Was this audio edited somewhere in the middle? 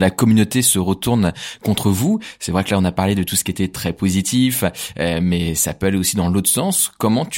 no; 0 cuts

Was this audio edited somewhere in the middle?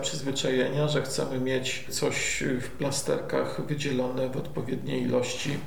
no; 0 cuts

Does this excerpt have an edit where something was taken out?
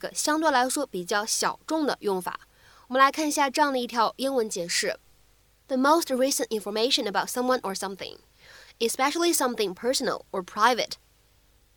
no; 0 cuts

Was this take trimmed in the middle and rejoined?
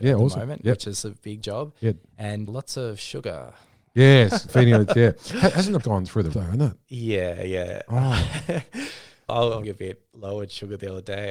yes; 7 cuts; at 1.4 s, 2.5 s, 4.5 s, 5.8 s, 6.3 s, 9.3 s, 9.6 s

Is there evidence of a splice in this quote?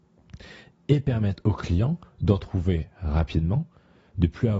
no; 0 cuts

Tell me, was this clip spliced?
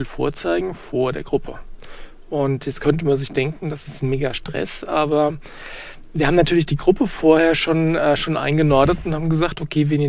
no; 0 cuts

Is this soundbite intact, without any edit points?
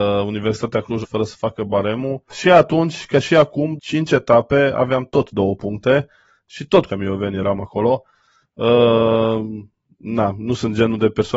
no; 4 cuts; at 1.0 s, 2.3 s, 3.8 s, 6.9 s

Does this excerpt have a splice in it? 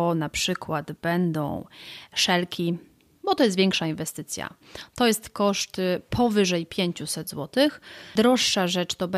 no; 0 cuts

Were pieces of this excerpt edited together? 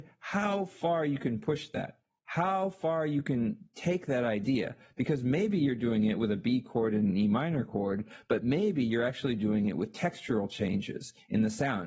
no; 0 cuts

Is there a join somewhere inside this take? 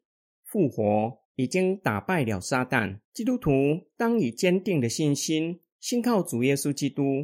yes; 2 cuts; at 1.2 s, 3.0 s

